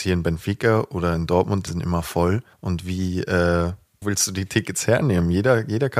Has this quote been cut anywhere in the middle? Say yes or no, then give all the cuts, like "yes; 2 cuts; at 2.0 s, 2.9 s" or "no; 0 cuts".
yes; 3 cuts; at 1.7 s, 2.5 s, 4.0 s